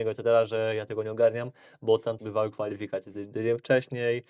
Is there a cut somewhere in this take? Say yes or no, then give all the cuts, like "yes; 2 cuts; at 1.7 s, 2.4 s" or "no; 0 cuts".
yes; 1 cut; at 2.2 s